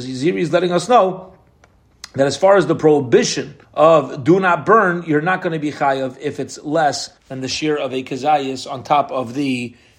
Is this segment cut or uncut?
cut